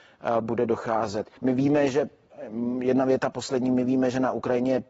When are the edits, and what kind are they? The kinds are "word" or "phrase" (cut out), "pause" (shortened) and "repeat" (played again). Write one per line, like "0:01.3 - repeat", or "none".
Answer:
0:01.4 - pause